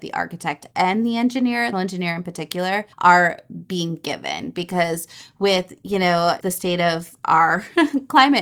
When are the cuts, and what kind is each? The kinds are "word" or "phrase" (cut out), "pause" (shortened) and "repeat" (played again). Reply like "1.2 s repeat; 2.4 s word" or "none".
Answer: 1.7 s phrase; 2.9 s pause; 6.4 s word